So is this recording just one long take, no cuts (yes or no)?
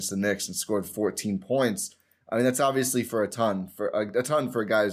yes